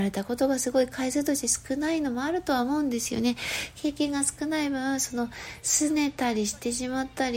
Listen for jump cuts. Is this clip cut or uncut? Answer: uncut